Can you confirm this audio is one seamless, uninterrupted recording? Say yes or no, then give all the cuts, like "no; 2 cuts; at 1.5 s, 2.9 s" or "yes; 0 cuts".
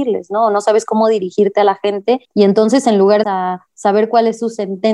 no; 2 cuts; at 2.2 s, 3.2 s